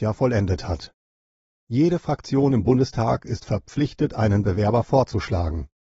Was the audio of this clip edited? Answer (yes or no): no